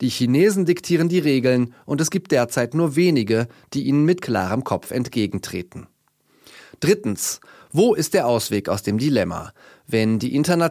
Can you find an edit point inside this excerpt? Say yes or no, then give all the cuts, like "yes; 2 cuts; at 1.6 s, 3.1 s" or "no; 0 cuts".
no; 0 cuts